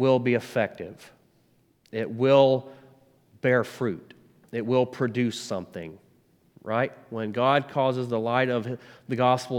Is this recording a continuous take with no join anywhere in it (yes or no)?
yes